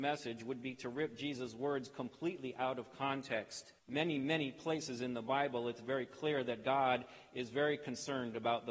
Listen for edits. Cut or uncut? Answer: cut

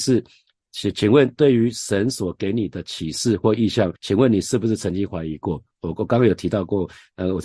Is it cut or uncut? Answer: cut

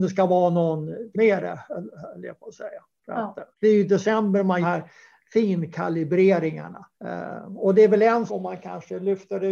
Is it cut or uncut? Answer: cut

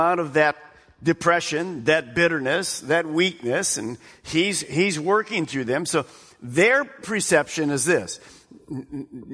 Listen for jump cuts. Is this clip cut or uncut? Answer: uncut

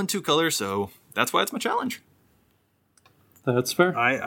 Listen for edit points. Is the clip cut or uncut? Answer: uncut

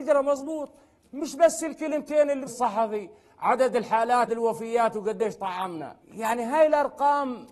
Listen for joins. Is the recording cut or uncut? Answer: cut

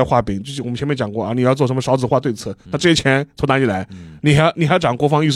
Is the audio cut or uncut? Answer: uncut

